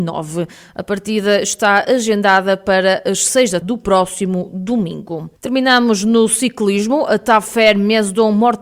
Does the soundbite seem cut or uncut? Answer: cut